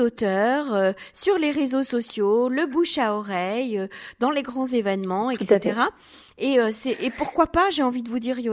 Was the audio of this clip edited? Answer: no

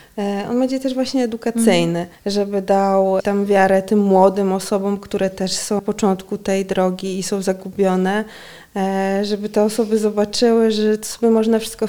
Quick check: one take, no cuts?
no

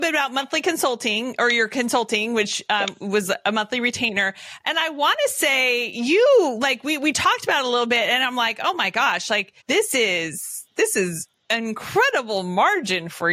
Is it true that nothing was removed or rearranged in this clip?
no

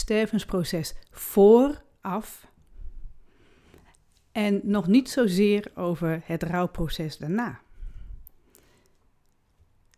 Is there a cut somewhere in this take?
no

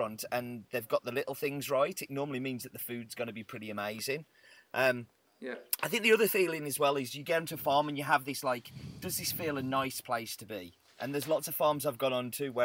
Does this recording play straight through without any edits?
yes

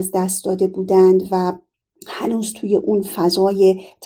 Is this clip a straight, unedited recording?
no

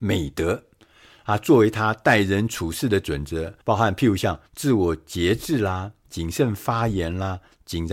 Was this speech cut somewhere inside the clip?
yes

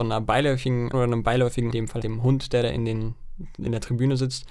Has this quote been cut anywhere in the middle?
yes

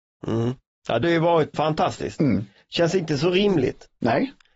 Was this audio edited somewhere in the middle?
yes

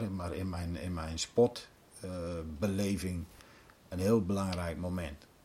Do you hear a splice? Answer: no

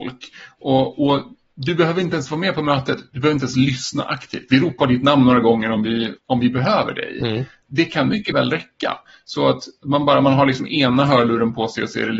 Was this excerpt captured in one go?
yes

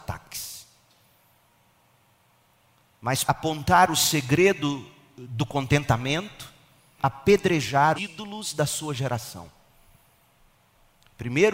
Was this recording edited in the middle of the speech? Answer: yes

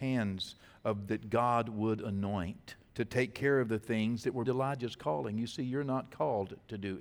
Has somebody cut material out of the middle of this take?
yes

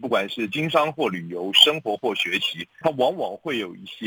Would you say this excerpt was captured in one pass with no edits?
no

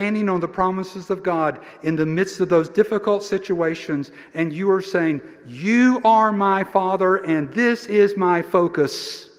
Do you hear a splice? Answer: no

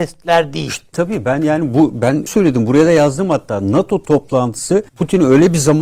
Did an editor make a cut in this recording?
yes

